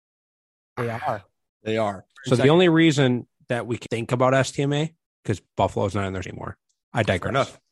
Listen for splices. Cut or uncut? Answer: cut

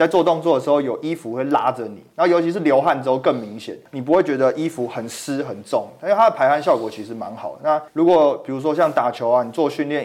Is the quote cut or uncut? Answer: cut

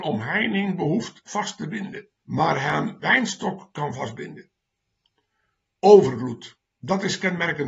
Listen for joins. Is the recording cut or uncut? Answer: cut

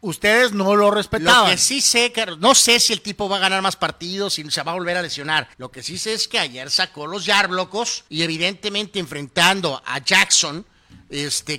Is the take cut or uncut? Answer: cut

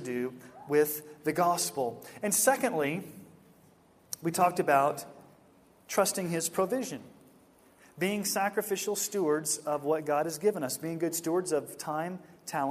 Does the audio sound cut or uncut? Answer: uncut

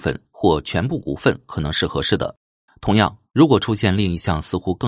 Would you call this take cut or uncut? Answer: cut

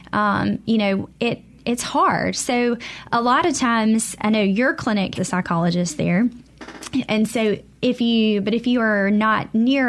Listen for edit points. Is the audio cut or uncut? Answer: cut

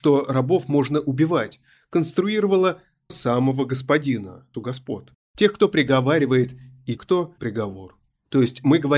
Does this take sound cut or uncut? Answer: cut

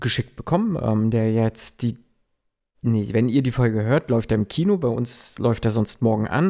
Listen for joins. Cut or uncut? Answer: uncut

